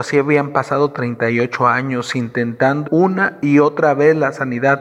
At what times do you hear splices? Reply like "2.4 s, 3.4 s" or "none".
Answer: 2.8 s